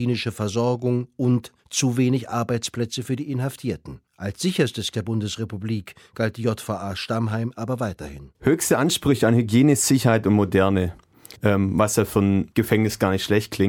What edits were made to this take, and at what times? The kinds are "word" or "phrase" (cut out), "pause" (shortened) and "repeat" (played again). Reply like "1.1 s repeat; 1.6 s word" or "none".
1.6 s pause; 4.1 s pause; 4.9 s word; 8.3 s pause; 11.4 s pause; 12.5 s pause